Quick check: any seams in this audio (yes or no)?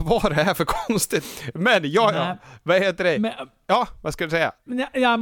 no